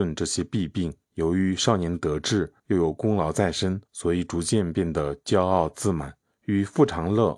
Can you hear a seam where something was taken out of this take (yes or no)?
yes